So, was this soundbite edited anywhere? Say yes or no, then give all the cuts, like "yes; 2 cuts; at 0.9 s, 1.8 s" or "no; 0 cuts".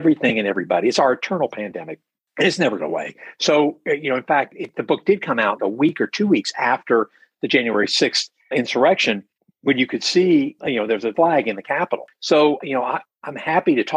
yes; 6 cuts; at 2.8 s, 5.6 s, 8.5 s, 10.6 s, 11.1 s, 12.6 s